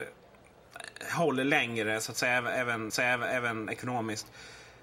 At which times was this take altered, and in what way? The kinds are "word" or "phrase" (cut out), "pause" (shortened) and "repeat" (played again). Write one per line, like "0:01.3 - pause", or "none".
0:02.9 - repeat